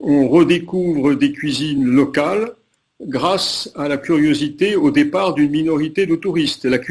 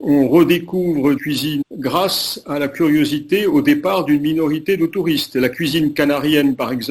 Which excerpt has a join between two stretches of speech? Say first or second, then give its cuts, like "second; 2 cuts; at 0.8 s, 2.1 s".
second; 2 cuts; at 1.2 s, 1.6 s